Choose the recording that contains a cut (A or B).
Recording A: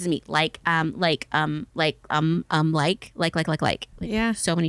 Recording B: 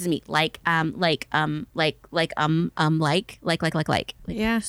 A